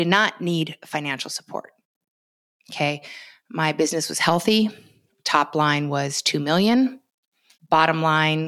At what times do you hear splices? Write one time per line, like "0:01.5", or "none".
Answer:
none